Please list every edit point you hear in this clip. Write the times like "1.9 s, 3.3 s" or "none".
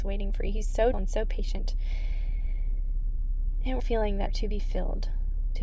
0.9 s, 3.8 s, 4.3 s